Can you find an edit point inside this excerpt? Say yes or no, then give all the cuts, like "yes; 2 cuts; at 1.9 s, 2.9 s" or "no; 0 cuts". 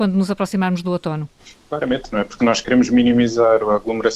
yes; 2 cuts; at 1.4 s, 2.4 s